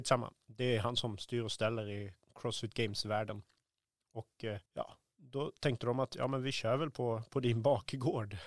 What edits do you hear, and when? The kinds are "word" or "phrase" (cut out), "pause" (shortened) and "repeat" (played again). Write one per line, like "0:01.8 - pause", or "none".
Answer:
0:04.7 - pause